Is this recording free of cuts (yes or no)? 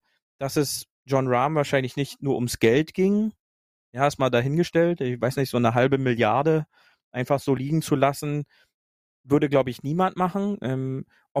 yes